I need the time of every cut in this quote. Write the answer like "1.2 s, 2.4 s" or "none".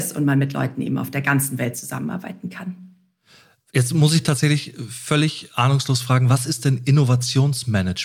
none